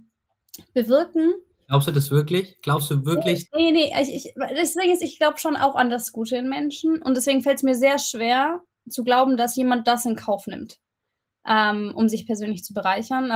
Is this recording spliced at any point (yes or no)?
no